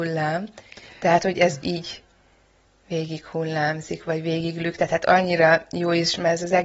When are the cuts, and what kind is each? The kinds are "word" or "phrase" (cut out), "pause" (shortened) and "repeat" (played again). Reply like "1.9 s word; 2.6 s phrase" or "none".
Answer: none

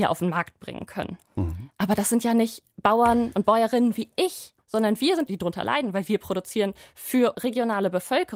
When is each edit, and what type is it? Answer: 1.2 s pause; 4.6 s pause; 5.3 s word; 7.3 s word

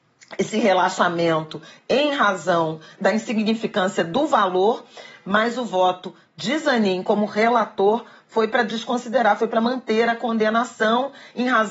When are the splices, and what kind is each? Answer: none

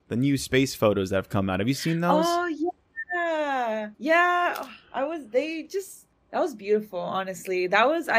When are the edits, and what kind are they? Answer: 3.9 s pause; 6.1 s pause

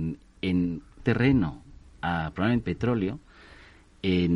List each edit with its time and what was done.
1.0 s word; 2.6 s word

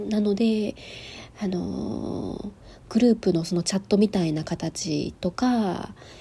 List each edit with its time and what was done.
none

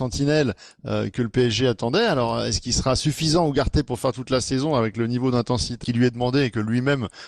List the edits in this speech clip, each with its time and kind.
5.8 s word

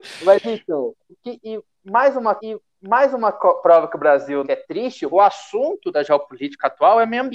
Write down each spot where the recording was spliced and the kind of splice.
1.1 s word; 2.4 s repeat; 4.4 s phrase; 5.1 s phrase

